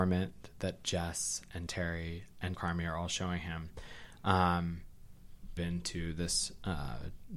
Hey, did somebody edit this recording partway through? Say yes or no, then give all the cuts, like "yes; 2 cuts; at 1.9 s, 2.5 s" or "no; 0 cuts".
yes; 3 cuts; at 1.7 s, 2.5 s, 5.6 s